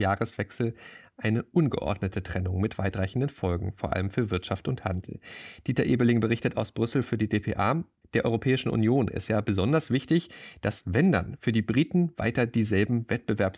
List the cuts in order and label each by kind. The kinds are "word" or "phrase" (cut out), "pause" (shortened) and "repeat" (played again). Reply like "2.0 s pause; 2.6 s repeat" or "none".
none